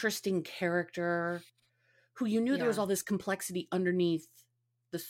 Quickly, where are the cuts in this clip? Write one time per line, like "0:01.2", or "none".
none